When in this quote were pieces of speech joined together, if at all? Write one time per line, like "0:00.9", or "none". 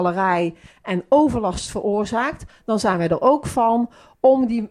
none